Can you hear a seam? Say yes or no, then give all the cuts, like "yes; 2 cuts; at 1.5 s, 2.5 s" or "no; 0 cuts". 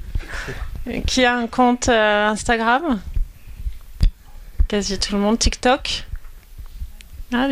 no; 0 cuts